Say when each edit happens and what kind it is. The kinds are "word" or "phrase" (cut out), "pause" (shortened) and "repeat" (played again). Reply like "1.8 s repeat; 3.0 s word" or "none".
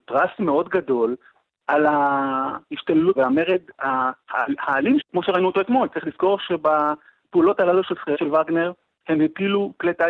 3.2 s word; 5.0 s word; 8.1 s word